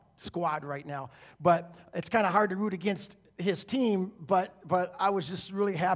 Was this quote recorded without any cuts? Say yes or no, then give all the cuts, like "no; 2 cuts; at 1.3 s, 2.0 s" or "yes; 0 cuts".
yes; 0 cuts